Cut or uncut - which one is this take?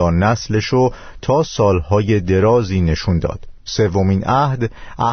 uncut